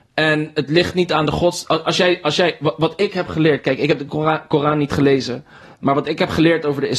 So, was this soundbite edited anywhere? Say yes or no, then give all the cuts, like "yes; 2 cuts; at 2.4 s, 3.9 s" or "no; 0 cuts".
no; 0 cuts